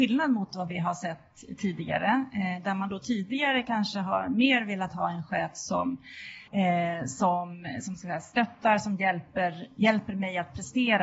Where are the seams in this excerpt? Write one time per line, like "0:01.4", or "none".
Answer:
0:06.5